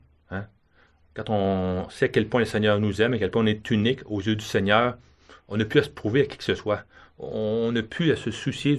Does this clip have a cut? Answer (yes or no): no